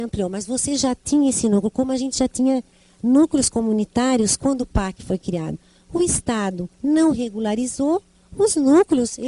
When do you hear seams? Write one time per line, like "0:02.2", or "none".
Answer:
0:06.7
0:08.1

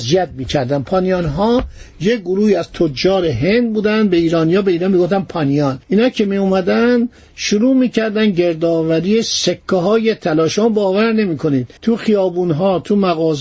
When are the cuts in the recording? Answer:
0:05.8
0:11.8

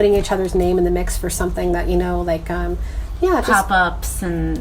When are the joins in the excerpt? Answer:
none

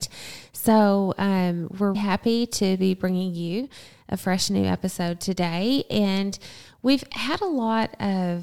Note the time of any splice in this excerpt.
0:01.9

